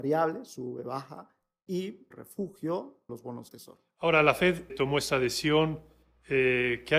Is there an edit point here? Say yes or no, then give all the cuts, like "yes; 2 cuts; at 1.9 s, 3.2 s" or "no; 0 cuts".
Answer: yes; 4 cuts; at 2.1 s, 3.1 s, 3.5 s, 4.7 s